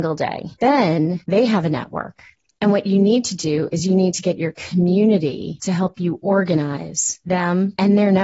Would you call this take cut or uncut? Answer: uncut